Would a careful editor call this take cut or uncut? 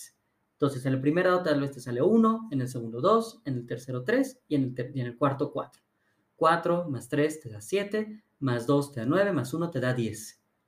uncut